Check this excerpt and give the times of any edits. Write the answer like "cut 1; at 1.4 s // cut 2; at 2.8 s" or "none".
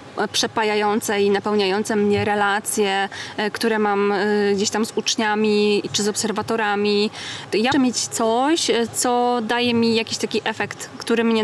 cut 1; at 7.7 s